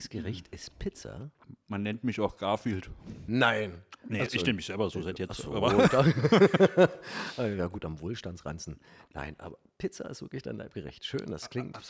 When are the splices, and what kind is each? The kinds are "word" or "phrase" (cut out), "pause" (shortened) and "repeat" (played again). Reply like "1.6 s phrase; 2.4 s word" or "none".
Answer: 4.3 s word